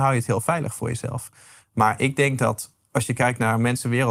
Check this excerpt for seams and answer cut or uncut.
uncut